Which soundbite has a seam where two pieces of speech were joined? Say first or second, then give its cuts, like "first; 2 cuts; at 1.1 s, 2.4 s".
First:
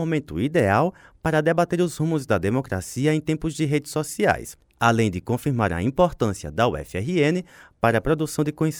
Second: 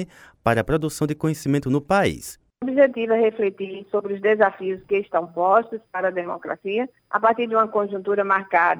second; 1 cut; at 7.0 s